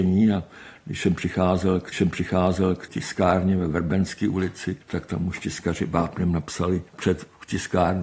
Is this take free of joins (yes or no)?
no